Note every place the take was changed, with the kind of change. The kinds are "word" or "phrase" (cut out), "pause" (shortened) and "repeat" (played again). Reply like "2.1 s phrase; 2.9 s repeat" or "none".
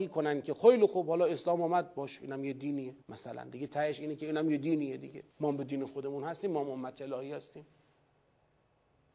3.0 s pause; 5.3 s pause